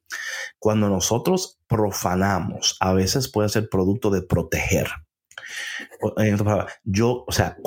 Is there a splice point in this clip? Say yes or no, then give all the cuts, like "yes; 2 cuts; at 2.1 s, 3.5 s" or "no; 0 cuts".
yes; 1 cut; at 1.6 s